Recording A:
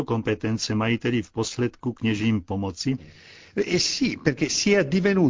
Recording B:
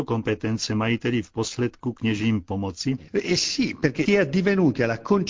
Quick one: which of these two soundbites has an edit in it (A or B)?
B